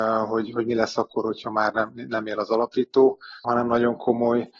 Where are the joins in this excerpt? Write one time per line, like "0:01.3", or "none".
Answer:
0:03.4